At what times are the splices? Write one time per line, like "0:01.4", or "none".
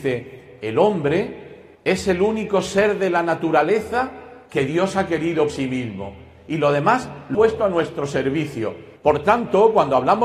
0:01.7
0:04.5
0:05.5
0:07.3
0:09.0